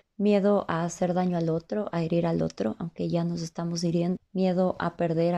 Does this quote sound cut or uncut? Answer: cut